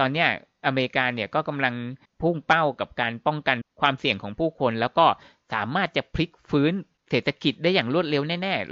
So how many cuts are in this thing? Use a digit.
0